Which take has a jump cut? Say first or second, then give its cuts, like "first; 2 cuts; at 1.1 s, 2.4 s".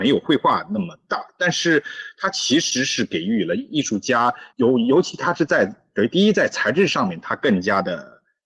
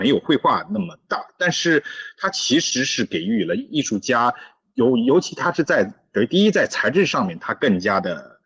first; 1 cut; at 4.5 s